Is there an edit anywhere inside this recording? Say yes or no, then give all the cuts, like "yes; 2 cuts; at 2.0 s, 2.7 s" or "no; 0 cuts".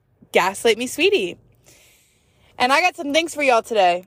no; 0 cuts